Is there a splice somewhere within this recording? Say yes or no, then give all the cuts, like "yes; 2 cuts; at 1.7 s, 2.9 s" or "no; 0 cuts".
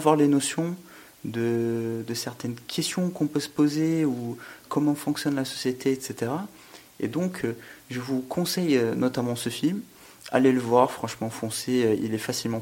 no; 0 cuts